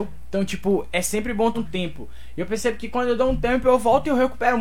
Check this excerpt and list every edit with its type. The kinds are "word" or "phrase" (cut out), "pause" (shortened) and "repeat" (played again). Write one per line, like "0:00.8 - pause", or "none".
0:01.5 - word